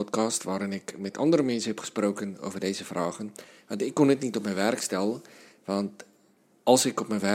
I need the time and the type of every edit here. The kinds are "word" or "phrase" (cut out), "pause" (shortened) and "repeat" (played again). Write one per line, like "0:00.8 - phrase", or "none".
none